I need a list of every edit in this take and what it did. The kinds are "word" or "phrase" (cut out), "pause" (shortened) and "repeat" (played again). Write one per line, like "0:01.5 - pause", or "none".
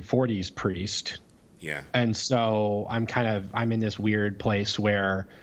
0:01.4 - pause